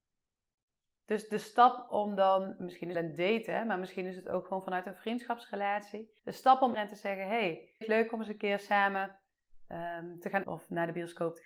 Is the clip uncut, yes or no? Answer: no